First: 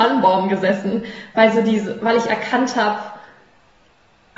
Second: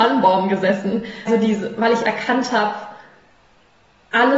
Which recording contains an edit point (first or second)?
second